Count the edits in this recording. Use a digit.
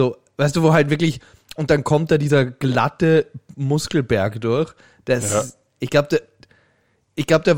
0